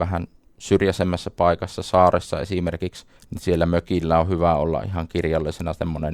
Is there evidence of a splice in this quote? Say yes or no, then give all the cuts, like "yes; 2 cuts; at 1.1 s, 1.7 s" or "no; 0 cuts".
yes; 1 cut; at 3.2 s